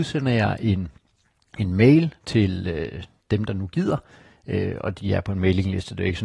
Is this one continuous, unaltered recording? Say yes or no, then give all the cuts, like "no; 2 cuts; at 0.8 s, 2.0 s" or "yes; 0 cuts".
yes; 0 cuts